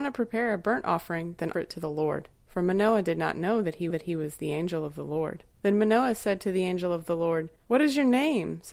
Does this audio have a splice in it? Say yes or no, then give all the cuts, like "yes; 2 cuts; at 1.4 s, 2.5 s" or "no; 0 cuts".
yes; 5 cuts; at 1.5 s, 2.3 s, 3.9 s, 5.5 s, 7.6 s